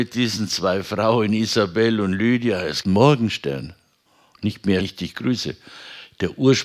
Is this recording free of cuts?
no; 3 cuts; at 2.8 s, 4.1 s, 4.8 s

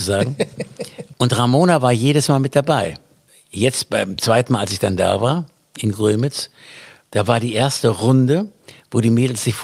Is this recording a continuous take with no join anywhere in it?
yes; 0 cuts

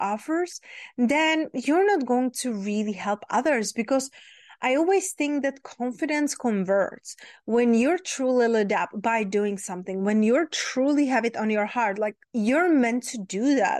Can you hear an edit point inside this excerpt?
yes; 1 cut; at 12.2 s

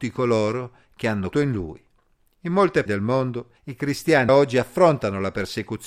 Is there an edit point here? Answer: yes; 4 cuts; at 1.3 s, 2.9 s, 3.6 s, 4.3 s

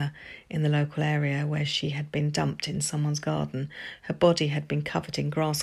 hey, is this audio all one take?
yes; 0 cuts

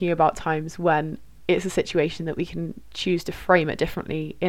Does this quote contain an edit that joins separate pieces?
no; 0 cuts

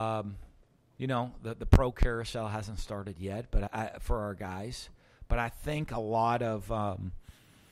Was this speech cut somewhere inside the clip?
yes; 1 cut; at 3.7 s

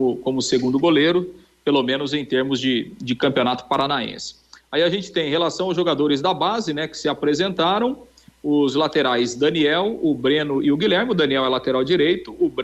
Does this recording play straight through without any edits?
yes; 0 cuts

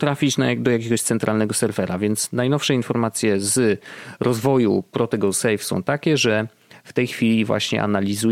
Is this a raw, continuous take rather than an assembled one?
yes; 0 cuts

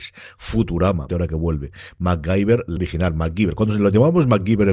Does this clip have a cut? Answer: yes; 2 cuts; at 1.1 s, 2.8 s

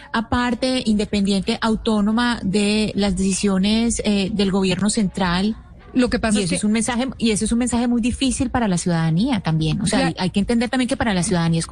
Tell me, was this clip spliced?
no; 0 cuts

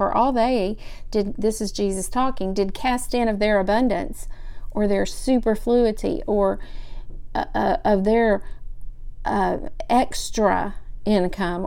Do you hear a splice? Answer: no; 0 cuts

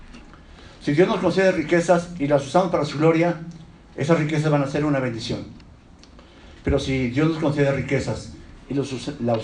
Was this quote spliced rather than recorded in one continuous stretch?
no; 0 cuts

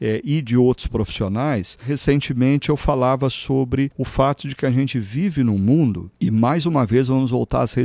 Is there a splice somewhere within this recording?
no; 0 cuts

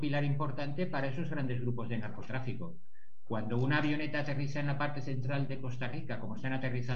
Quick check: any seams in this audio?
no; 0 cuts

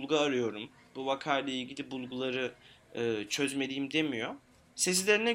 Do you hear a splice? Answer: no; 0 cuts

